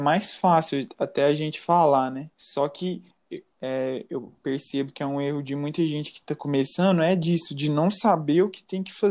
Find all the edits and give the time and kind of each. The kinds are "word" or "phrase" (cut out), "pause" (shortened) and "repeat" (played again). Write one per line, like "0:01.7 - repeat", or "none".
0:02.3 - pause
0:03.5 - pause